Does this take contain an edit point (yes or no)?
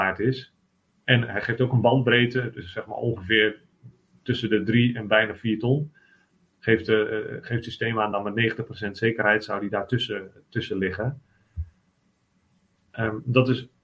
no